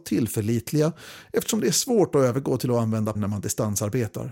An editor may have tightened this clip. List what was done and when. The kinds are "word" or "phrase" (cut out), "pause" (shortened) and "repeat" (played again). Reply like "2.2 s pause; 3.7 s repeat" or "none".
3.1 s word